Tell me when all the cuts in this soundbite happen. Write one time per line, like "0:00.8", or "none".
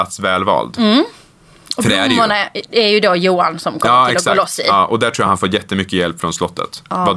none